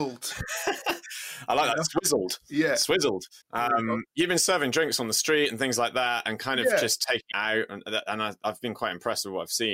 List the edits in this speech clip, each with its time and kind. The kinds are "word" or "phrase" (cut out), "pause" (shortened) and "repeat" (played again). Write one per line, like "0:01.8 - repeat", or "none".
0:03.4 - pause
0:04.1 - pause
0:07.3 - word